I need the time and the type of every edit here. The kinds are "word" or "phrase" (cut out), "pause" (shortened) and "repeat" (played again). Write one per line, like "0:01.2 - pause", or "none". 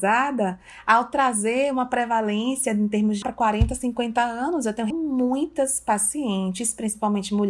0:03.2 - phrase
0:04.9 - word